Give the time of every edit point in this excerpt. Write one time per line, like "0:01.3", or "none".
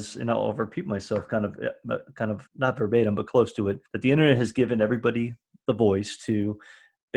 0:02.5
0:03.9